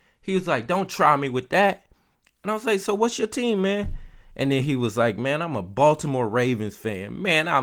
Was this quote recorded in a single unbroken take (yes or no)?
yes